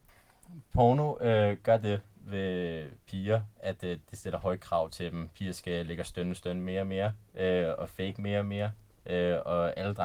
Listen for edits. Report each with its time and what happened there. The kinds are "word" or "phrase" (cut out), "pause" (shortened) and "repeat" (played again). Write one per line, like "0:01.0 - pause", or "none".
0:03.0 - pause